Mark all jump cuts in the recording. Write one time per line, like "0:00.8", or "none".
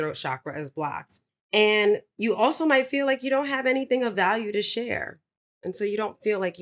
none